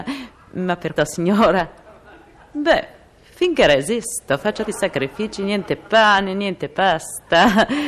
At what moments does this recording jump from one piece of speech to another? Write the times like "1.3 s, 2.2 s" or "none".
1.0 s, 4.6 s